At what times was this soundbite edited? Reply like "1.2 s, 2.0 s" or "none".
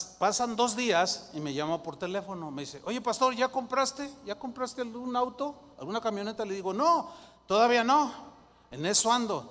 none